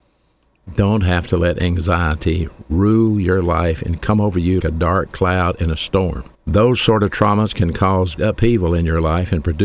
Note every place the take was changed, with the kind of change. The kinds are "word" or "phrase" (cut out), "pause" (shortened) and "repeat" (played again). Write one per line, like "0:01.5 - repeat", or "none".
0:04.6 - word
0:06.3 - pause
0:08.2 - word